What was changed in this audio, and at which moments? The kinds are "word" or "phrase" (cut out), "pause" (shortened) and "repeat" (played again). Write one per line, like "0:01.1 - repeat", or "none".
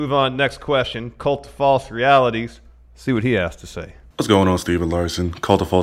none